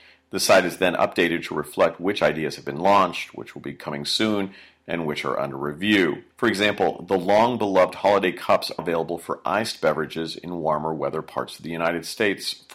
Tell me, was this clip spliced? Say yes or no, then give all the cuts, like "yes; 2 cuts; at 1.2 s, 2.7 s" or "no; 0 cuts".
yes; 2 cuts; at 6.3 s, 8.8 s